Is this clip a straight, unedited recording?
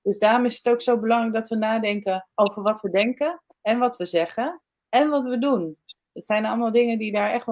yes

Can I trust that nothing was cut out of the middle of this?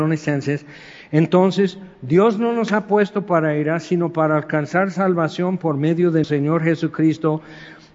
no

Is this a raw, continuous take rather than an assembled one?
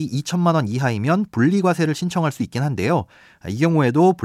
yes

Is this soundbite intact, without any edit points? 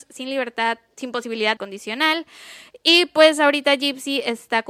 no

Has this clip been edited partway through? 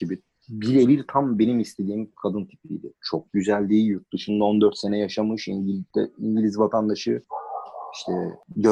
no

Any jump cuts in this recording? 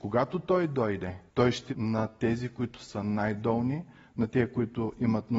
yes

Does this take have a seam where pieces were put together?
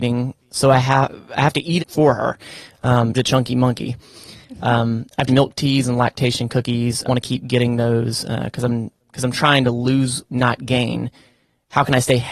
yes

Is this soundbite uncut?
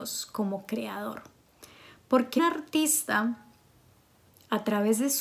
no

